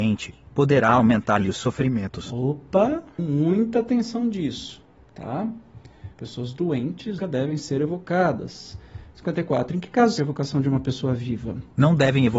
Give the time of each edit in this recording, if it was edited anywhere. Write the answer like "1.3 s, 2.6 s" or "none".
3.2 s, 6.1 s, 7.2 s, 10.2 s

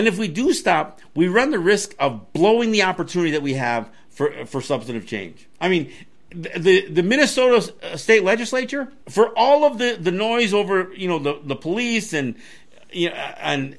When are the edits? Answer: 5.5 s, 9.0 s

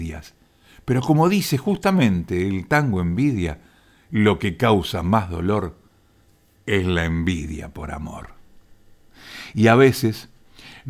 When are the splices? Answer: none

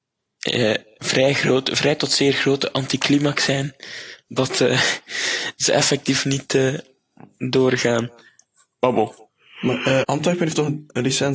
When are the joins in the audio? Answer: 10.0 s

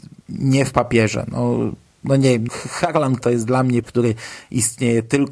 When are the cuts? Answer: 2.5 s, 3.2 s, 3.8 s

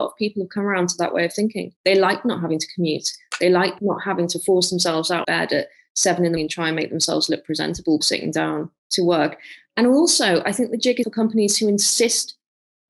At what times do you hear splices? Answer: 1.8 s, 5.2 s, 6.4 s, 8.0 s, 8.8 s, 11.0 s

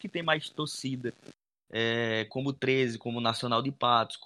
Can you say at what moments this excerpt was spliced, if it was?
none

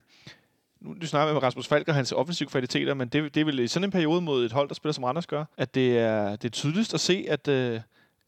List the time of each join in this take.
5.5 s

